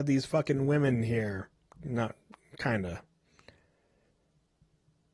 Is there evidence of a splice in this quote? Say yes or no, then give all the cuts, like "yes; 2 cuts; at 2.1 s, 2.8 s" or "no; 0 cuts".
no; 0 cuts